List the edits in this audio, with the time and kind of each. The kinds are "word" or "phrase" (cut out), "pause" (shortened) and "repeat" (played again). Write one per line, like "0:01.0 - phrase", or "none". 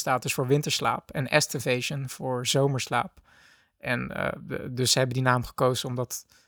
none

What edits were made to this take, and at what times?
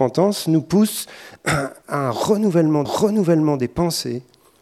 0:01.8 - pause
0:02.8 - repeat

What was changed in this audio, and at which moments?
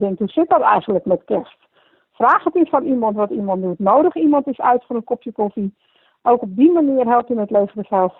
none

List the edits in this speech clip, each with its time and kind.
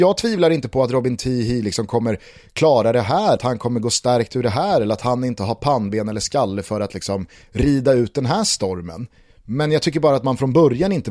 0:03.4 - word
0:07.4 - word

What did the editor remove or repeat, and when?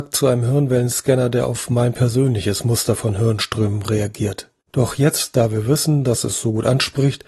0:04.6 - pause

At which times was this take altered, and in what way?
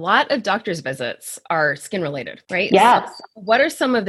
none

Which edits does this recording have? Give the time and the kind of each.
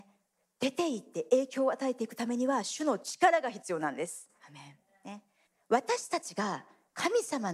0:04.4 - pause
0:05.4 - pause

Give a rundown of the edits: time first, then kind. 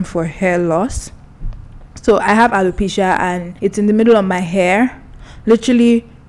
0:01.9 - pause
0:03.6 - pause

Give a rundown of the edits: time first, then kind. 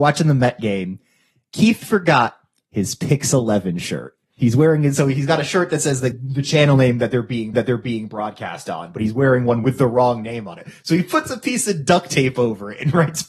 0:06.1 - word
0:07.5 - repeat

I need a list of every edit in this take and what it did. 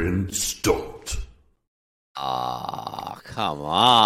none

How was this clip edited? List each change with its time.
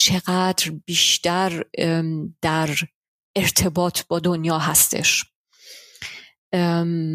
none

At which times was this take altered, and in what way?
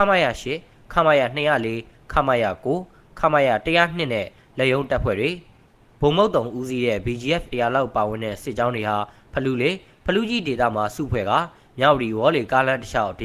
0:07.5 - word

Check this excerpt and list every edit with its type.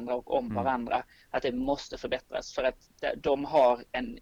none

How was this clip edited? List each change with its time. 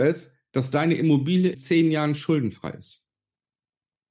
0:01.5 - word

